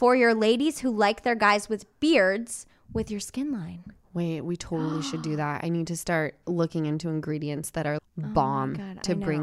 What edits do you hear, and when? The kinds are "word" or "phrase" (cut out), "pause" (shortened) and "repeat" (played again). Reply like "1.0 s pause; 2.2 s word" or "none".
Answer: 8.0 s word